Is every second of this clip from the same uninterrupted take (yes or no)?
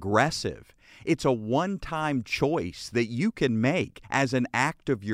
no